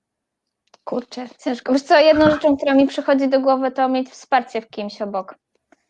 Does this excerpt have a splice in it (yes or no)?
no